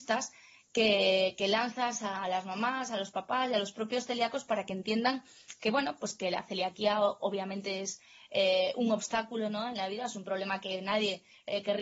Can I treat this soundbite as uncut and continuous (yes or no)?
yes